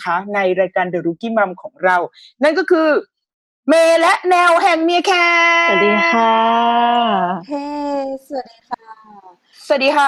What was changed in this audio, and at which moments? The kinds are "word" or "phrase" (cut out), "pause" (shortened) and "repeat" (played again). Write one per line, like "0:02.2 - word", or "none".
none

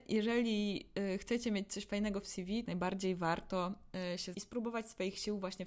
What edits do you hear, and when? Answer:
0:02.2 - word
0:02.6 - phrase
0:04.3 - word

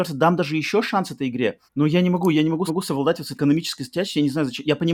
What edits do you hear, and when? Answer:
0:01.7 - pause
0:02.7 - repeat
0:03.3 - word

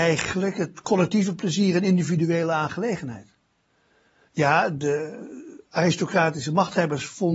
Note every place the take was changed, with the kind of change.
none

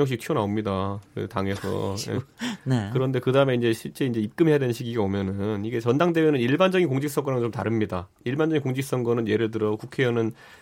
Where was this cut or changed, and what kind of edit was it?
none

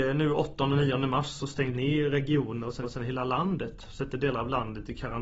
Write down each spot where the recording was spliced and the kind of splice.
0:01.7 - word
0:02.8 - repeat

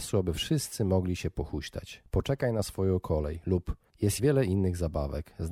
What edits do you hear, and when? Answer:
0:04.2 - word

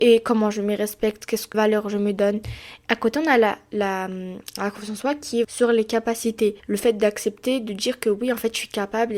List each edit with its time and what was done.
0:01.5 - word
0:05.4 - word
0:06.6 - pause

